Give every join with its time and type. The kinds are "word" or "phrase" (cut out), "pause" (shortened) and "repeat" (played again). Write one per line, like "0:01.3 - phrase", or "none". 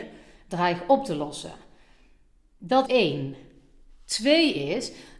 0:02.9 - word